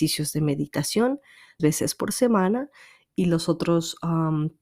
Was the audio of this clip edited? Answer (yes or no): yes